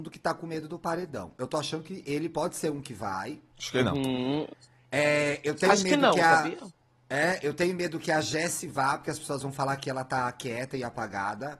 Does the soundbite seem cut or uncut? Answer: uncut